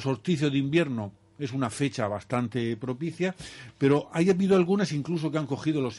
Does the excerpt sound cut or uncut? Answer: uncut